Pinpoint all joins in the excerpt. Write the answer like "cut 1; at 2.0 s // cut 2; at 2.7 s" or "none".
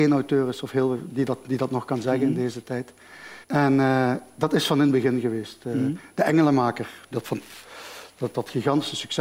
cut 1; at 3.4 s